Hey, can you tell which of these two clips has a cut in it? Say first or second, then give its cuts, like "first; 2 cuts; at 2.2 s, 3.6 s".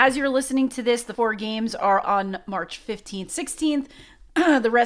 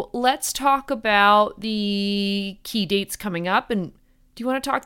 first; 3 cuts; at 1.1 s, 2.0 s, 3.3 s